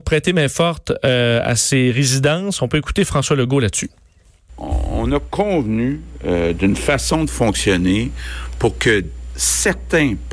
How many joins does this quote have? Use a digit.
0